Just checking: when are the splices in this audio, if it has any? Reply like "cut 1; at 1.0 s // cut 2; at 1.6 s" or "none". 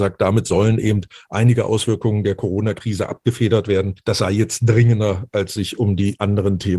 cut 1; at 4.0 s